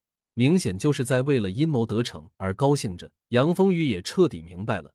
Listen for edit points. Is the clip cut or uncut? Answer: cut